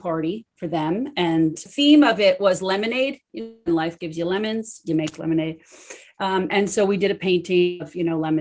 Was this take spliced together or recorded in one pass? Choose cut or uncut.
cut